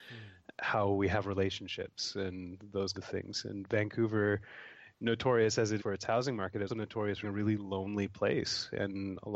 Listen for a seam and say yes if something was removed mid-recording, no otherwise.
yes